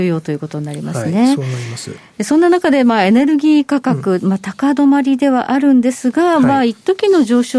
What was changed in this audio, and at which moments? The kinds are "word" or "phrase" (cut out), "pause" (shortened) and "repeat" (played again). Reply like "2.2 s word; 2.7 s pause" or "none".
none

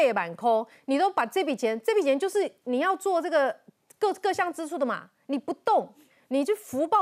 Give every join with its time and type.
none

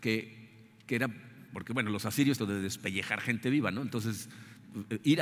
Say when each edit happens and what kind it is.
2.4 s phrase

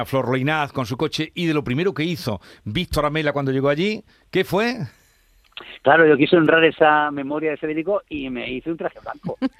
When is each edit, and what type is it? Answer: none

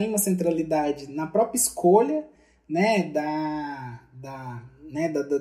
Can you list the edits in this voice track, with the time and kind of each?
none

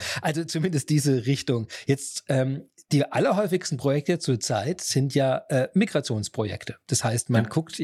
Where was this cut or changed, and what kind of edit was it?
none

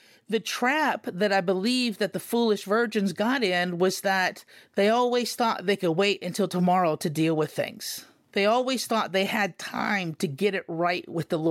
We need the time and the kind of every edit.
none

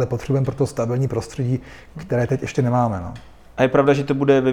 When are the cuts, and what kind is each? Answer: none

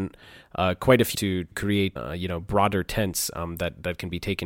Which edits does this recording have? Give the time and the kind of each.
1.1 s word; 2.0 s word

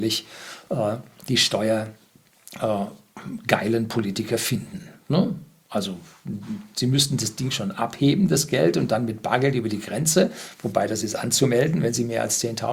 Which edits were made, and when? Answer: none

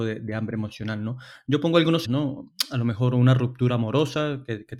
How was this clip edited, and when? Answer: 2.0 s word

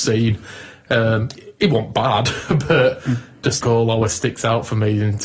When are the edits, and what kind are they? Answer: 3.6 s word

